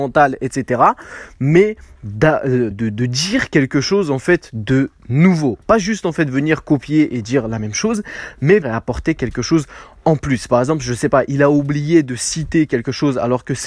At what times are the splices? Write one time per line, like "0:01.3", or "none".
0:02.7
0:08.6